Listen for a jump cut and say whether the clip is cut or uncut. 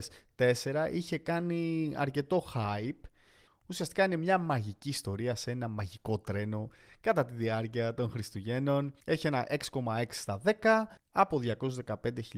cut